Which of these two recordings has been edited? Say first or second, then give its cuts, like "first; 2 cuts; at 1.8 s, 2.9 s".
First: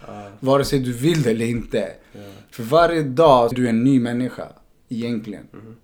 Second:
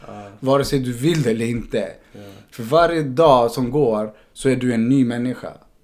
first; 1 cut; at 3.5 s